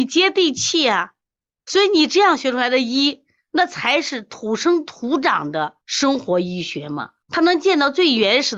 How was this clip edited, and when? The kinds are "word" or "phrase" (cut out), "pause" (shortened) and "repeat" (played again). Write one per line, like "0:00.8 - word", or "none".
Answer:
0:05.8 - pause
0:07.2 - pause